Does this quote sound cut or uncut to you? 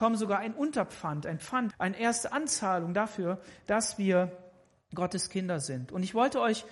cut